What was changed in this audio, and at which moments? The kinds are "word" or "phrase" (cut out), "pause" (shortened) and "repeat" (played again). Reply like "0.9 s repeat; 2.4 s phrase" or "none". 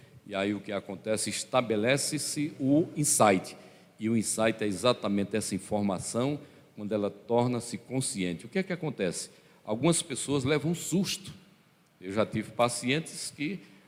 none